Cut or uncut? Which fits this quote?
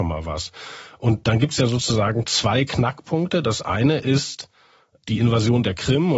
uncut